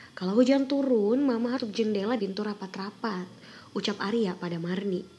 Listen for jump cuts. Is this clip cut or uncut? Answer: cut